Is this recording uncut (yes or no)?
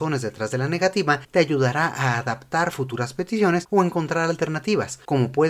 yes